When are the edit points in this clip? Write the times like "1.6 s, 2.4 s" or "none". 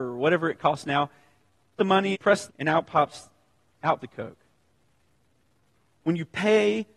1.8 s, 2.1 s, 2.5 s, 4.0 s